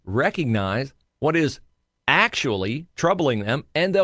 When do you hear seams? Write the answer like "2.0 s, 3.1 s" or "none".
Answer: 1.1 s